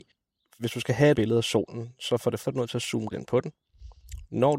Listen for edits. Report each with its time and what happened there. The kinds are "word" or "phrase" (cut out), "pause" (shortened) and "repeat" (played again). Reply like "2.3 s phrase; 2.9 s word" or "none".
1.1 s word; 2.4 s word; 3.1 s word